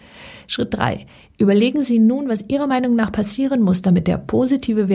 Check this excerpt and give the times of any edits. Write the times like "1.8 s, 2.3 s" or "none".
none